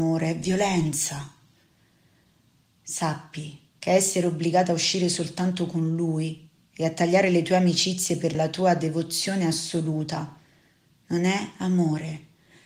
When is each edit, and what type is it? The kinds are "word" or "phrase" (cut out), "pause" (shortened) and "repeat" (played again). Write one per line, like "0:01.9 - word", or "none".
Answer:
0:03.7 - pause
0:06.6 - pause
0:08.3 - word